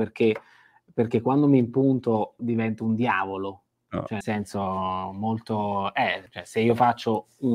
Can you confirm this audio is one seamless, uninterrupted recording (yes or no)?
no